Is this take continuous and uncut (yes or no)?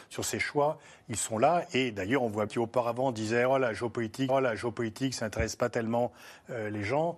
no